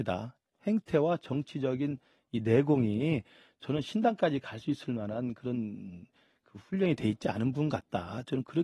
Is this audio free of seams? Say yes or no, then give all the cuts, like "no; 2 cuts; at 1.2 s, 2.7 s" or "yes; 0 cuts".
yes; 0 cuts